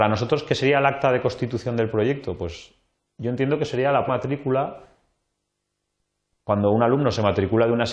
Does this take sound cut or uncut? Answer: cut